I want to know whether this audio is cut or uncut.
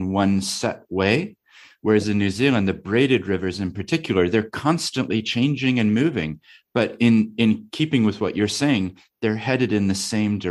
uncut